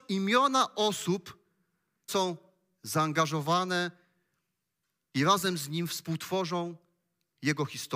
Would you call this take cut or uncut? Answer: cut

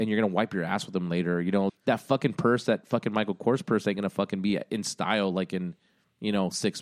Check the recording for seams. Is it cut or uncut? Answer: cut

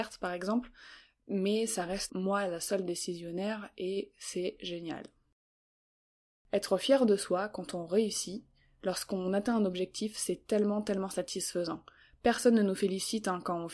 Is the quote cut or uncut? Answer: cut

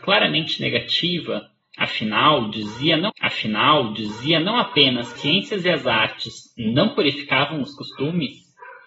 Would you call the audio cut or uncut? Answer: cut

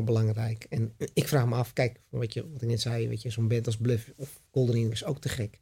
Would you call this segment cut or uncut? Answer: uncut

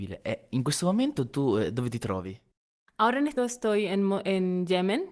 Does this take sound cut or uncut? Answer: cut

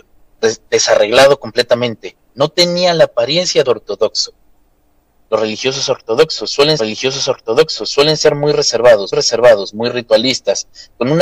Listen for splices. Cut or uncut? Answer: cut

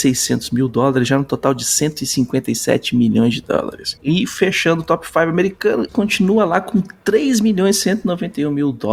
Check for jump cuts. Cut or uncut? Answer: cut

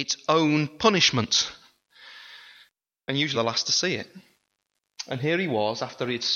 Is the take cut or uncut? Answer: cut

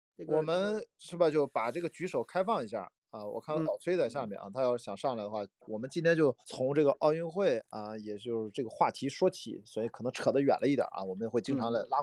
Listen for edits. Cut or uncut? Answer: cut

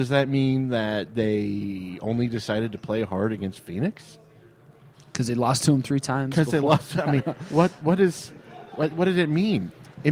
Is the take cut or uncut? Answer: uncut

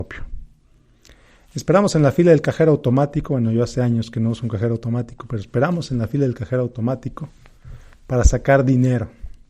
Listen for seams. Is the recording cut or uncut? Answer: uncut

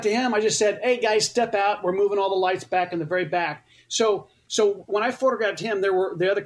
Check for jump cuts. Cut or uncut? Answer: uncut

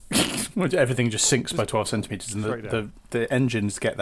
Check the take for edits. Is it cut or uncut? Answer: uncut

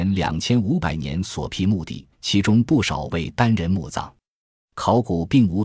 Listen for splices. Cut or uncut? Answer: cut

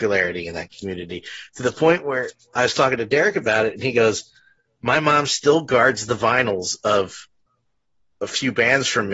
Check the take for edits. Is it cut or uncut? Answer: uncut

